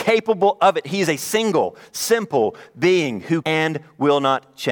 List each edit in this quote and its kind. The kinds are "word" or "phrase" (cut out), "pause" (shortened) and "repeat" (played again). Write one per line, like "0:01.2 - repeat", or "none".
0:03.4 - word